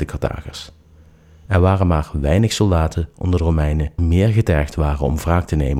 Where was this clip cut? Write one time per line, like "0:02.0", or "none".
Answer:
0:04.0